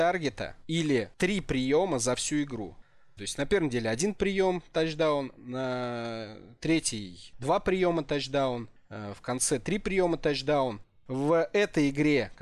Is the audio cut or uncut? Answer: uncut